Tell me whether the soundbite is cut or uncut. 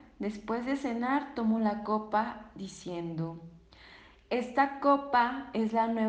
uncut